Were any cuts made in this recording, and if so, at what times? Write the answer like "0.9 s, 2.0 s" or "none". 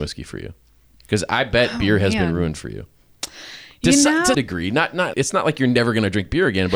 4.3 s, 5.1 s